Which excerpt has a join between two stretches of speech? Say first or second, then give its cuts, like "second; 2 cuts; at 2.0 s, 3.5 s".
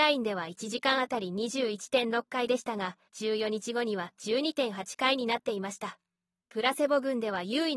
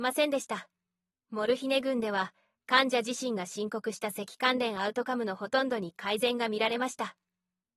first; 1 cut; at 3.1 s